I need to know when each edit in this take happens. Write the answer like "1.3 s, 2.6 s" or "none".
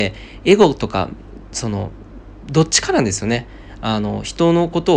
none